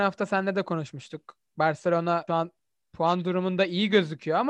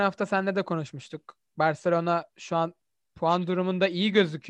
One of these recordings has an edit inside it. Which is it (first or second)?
first